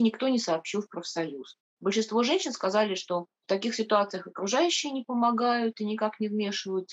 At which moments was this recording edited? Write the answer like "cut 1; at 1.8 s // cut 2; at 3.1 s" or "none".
cut 1; at 3.4 s